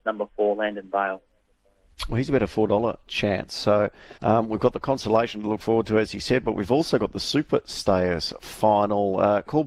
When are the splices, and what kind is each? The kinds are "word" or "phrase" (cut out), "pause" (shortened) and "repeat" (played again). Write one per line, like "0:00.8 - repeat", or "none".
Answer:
0:04.2 - pause